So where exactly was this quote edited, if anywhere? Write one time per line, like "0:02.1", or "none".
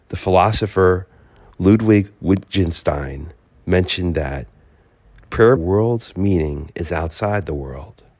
0:05.6